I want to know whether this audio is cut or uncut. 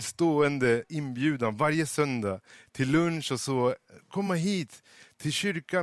uncut